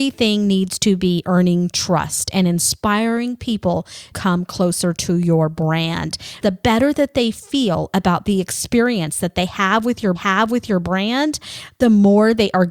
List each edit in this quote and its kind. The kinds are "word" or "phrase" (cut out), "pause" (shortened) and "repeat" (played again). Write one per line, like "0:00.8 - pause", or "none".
0:04.1 - word
0:06.4 - word
0:10.1 - repeat